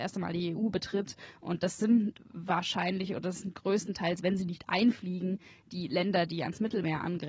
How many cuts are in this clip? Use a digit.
0